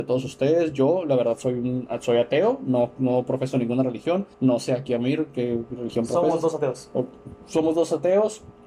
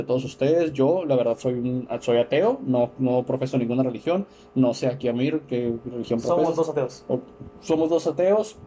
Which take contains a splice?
first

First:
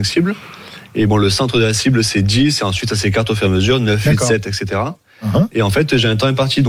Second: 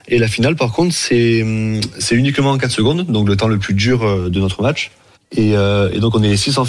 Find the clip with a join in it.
second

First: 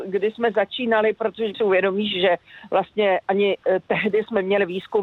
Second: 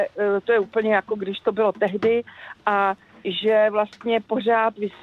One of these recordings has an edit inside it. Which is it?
first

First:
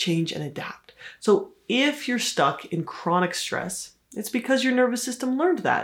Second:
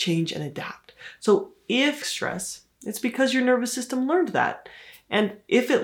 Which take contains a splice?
second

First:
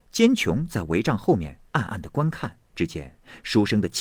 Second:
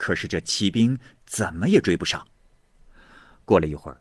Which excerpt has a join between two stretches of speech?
first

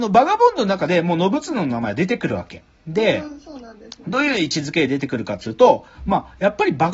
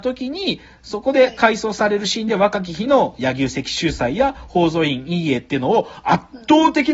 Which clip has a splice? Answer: first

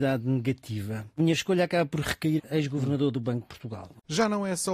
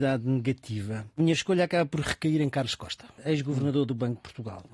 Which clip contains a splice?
first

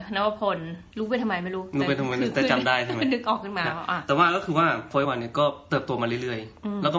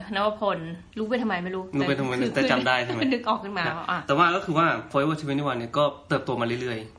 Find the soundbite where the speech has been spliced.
first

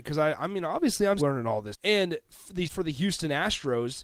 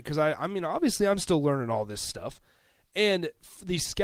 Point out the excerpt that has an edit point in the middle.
first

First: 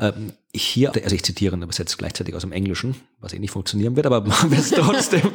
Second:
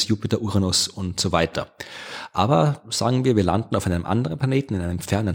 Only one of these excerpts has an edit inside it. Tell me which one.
first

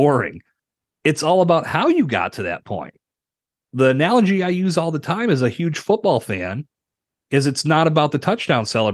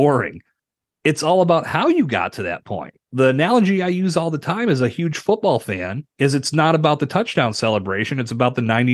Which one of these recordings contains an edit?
second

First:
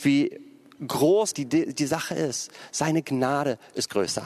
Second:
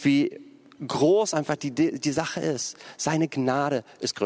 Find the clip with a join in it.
first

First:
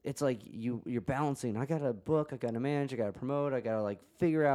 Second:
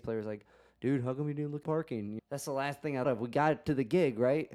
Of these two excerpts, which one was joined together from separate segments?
second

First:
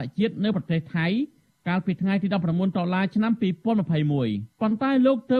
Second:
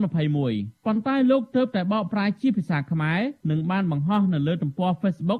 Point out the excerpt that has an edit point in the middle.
second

